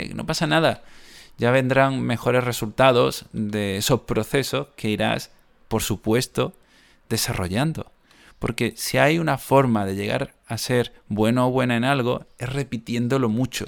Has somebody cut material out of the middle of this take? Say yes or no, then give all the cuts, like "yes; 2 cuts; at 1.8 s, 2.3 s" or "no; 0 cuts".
no; 0 cuts